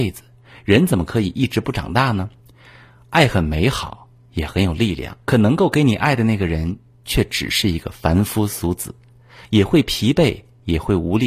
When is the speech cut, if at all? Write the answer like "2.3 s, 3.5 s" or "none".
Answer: 2.4 s, 5.2 s

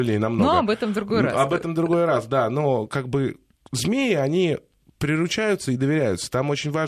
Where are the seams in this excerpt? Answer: none

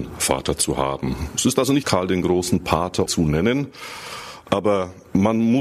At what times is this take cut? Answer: 1.8 s, 3.1 s

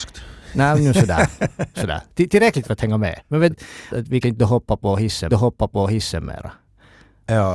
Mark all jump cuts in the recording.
2.6 s, 3.5 s, 3.9 s, 4.2 s, 5.3 s

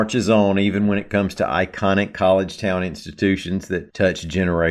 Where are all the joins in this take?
none

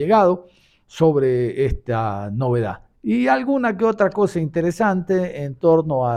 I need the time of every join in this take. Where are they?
2.9 s

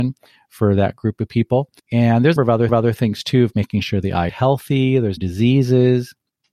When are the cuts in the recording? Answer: 1.8 s, 2.4 s, 2.7 s, 3.5 s, 4.3 s, 5.2 s

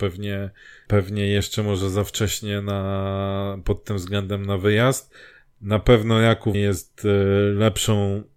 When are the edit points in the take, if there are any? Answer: 6.5 s

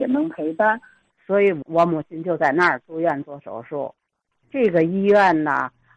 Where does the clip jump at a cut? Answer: none

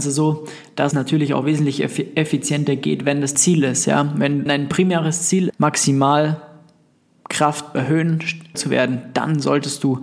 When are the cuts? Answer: 0.9 s, 3.3 s, 4.5 s, 5.5 s, 7.7 s, 8.5 s

